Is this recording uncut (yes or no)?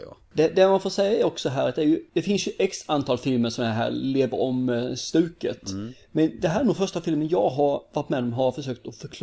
yes